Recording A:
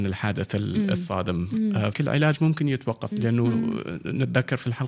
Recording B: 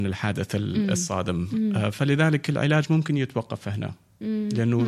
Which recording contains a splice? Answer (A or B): A